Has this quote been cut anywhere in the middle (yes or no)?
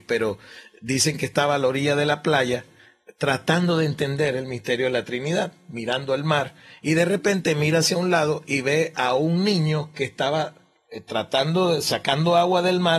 no